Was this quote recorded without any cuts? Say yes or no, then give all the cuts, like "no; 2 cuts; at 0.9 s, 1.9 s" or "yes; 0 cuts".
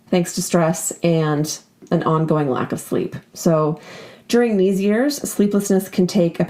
no; 1 cut; at 3.3 s